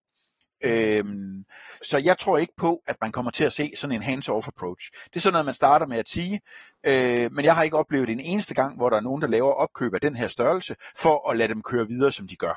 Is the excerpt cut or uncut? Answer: cut